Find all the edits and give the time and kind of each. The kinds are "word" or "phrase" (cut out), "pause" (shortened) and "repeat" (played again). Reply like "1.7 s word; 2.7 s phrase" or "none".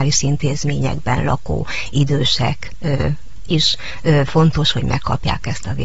none